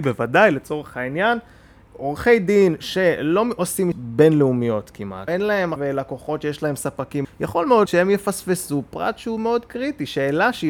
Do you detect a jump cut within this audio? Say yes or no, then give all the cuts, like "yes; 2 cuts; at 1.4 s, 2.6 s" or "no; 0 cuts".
yes; 6 cuts; at 1.9 s, 3.9 s, 5.3 s, 5.8 s, 7.2 s, 7.9 s